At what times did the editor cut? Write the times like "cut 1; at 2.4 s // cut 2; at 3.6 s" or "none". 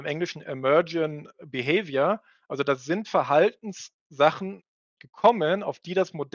none